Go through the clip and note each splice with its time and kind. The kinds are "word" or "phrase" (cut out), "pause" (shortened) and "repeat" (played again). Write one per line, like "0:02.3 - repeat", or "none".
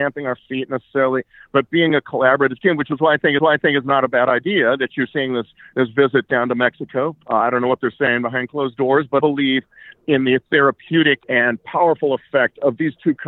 0:03.4 - repeat
0:07.2 - pause
0:09.2 - phrase
0:11.2 - pause